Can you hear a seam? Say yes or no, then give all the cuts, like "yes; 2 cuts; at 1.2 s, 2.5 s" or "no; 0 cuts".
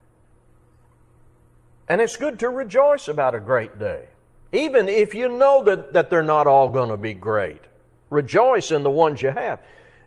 no; 0 cuts